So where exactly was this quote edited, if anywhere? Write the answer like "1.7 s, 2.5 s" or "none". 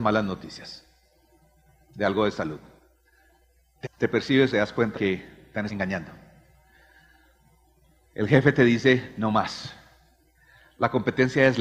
3.8 s, 4.5 s, 4.9 s, 5.7 s